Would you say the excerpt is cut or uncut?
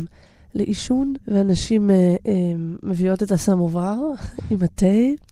cut